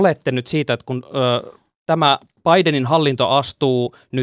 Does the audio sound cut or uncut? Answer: uncut